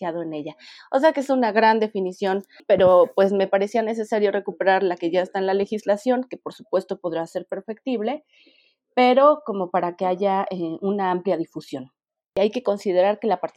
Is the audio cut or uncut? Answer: uncut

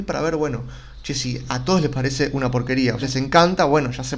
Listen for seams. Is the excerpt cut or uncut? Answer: cut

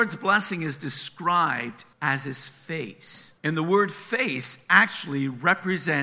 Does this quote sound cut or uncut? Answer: cut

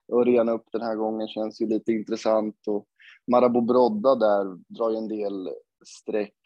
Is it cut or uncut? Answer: uncut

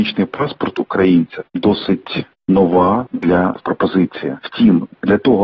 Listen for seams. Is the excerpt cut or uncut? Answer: cut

